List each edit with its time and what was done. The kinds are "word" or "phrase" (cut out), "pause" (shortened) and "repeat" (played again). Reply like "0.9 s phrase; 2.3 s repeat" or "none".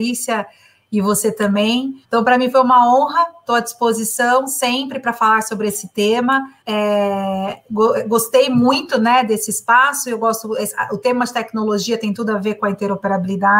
2.0 s pause; 6.6 s pause